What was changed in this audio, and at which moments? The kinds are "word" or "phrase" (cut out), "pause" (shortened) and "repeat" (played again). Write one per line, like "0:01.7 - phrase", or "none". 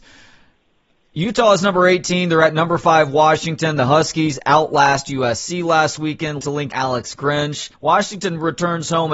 0:06.4 - word
0:06.7 - phrase
0:07.7 - pause